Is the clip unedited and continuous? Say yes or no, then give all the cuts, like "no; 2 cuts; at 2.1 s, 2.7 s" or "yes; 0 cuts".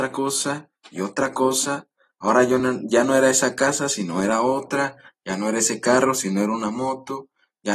yes; 0 cuts